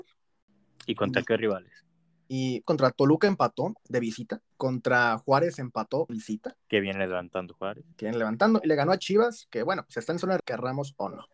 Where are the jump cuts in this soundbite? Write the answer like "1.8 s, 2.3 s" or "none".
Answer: 2.6 s, 3.8 s, 4.5 s, 6.1 s, 7.9 s, 10.4 s